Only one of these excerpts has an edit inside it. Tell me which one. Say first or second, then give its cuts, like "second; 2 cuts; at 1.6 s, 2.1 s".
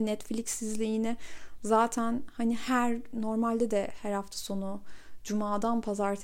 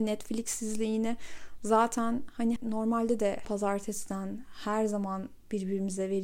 second; 2 cuts; at 2.6 s, 3.4 s